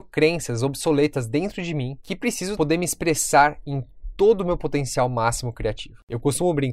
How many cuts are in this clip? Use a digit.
1